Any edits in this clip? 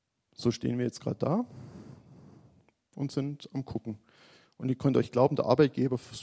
no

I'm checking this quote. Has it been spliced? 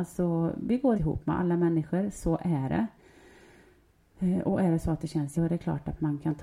yes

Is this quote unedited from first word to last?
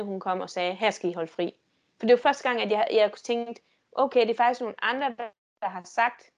yes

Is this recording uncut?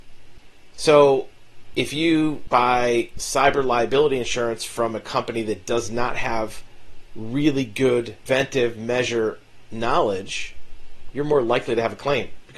yes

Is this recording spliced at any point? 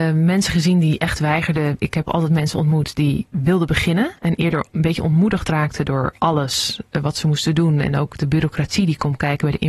yes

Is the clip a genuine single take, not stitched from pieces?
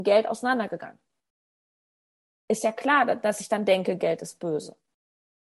yes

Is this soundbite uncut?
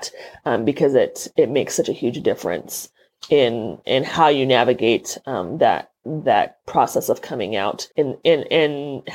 no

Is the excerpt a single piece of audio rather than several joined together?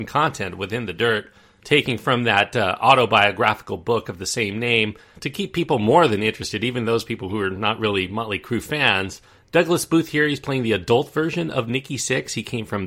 yes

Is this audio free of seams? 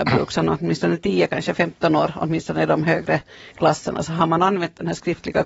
yes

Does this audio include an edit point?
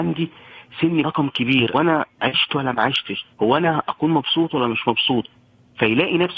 yes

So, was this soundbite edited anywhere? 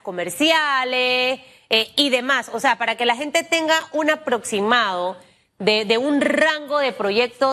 no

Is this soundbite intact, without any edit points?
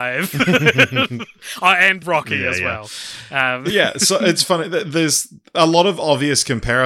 no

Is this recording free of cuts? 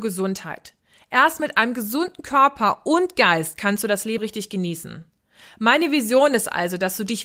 no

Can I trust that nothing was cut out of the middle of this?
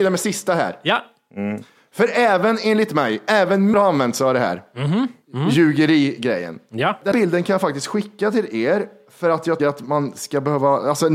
no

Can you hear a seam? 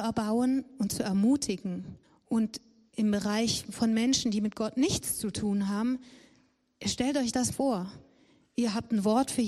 yes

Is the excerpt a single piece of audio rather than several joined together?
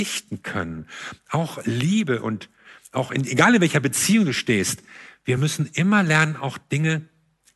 yes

